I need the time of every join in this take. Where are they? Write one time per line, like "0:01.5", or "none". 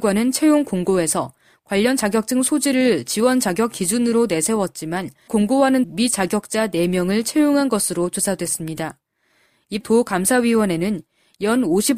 0:05.3
0:05.8
0:09.8